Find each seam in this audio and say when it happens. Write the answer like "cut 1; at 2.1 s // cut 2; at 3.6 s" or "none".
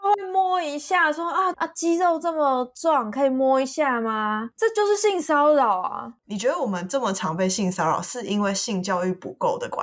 cut 1; at 1.5 s